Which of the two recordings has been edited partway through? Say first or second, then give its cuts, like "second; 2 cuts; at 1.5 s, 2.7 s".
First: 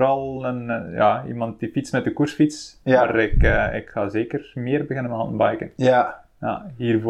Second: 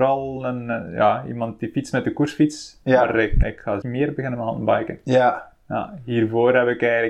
second; 2 cuts; at 3.4 s, 3.8 s